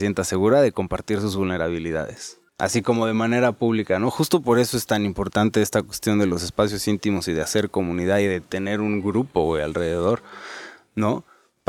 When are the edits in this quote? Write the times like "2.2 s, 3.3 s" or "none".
2.5 s